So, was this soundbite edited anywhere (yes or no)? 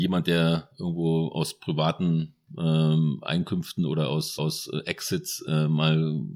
yes